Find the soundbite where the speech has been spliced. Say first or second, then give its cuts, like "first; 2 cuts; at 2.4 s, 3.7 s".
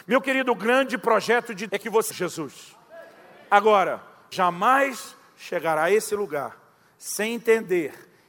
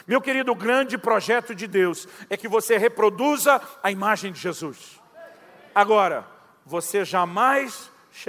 first; 3 cuts; at 1.7 s, 2.1 s, 4.3 s